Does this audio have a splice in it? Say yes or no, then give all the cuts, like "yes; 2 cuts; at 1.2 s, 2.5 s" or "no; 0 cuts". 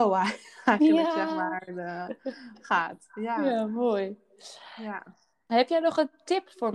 no; 0 cuts